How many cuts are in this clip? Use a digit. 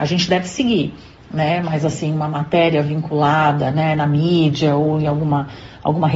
0